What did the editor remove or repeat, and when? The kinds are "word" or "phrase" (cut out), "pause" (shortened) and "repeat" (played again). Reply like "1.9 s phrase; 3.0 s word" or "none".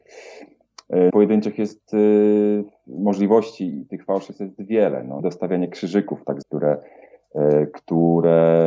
1.1 s phrase; 5.2 s phrase; 6.4 s word